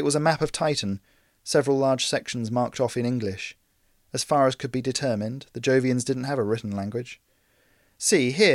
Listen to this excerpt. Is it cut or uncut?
uncut